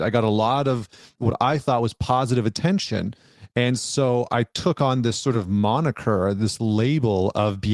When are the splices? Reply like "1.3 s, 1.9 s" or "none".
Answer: none